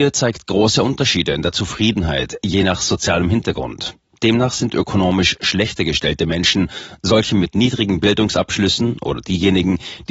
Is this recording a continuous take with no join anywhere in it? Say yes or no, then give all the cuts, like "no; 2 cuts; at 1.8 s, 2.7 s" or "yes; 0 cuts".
yes; 0 cuts